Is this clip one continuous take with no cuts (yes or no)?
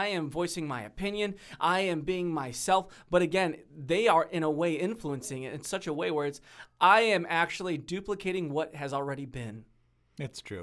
yes